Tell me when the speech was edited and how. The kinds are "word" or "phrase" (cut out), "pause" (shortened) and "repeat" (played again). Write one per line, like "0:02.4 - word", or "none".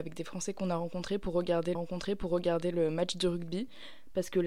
0:01.7 - repeat